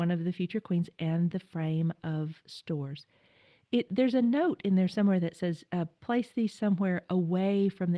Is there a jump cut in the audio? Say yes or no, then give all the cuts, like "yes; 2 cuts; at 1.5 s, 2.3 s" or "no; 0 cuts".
no; 0 cuts